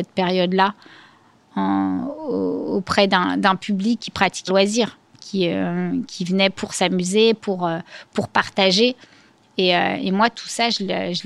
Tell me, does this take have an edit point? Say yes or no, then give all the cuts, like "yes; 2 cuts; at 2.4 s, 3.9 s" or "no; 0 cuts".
yes; 2 cuts; at 4.0 s, 4.5 s